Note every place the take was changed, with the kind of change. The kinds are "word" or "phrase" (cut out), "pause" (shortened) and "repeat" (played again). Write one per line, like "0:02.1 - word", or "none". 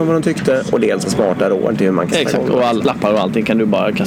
0:01.0 - word
0:02.1 - phrase
0:02.8 - word